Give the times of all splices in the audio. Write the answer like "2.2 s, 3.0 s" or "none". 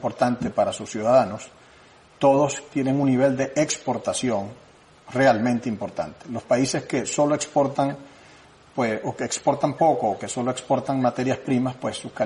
none